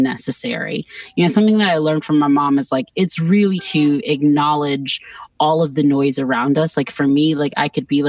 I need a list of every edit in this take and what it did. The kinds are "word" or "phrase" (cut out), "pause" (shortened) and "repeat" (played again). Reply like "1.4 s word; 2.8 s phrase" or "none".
3.6 s word